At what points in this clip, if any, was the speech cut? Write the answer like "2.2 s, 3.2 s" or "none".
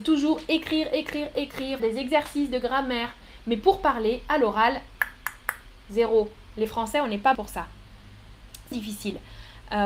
1.8 s, 7.3 s, 8.7 s

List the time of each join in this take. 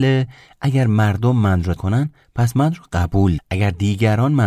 1.8 s, 3.4 s

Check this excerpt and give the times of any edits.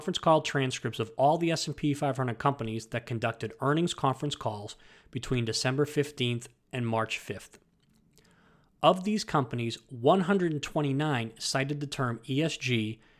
none

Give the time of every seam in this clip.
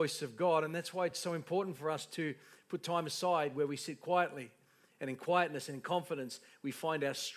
none

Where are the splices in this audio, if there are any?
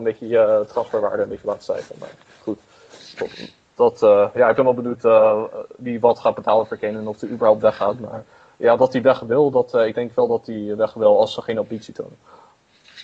none

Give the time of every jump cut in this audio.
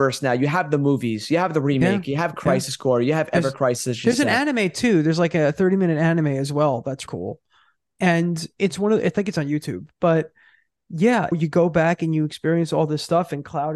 7.1 s

